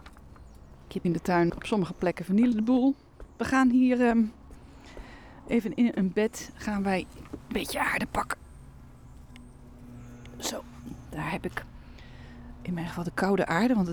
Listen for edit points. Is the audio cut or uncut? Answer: cut